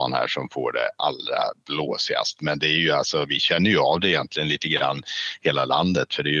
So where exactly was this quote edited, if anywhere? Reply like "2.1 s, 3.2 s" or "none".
none